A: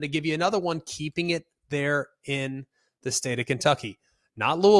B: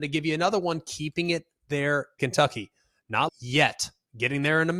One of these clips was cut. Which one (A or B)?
B